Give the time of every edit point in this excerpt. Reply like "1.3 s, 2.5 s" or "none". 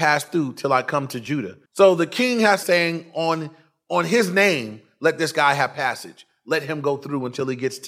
1.7 s, 2.6 s